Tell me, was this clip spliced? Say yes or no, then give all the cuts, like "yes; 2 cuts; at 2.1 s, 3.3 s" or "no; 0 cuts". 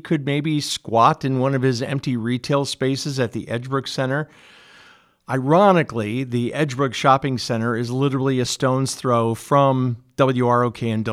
no; 0 cuts